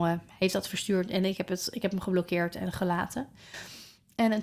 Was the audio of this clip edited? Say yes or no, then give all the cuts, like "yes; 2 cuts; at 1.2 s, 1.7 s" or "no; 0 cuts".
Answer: no; 0 cuts